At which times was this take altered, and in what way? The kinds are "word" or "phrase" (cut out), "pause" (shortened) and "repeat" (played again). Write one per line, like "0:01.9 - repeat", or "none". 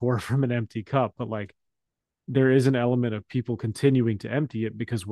none

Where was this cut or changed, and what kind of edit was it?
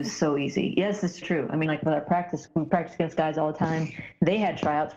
0:01.2 - word
0:01.7 - word
0:02.5 - word

